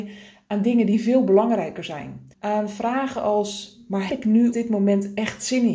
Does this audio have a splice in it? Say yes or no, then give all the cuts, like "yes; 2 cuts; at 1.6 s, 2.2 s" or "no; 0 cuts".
yes; 3 cuts; at 2.3 s, 4.1 s, 4.5 s